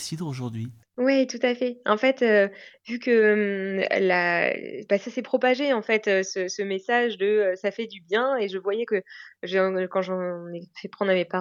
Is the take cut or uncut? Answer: uncut